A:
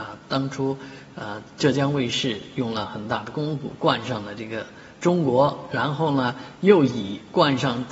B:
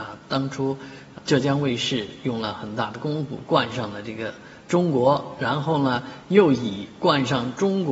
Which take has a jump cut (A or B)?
B